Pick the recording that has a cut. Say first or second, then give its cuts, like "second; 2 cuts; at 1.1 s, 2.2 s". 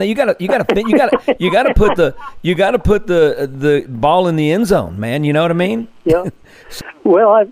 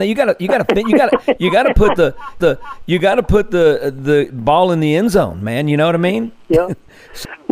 second; 1 cut; at 2.4 s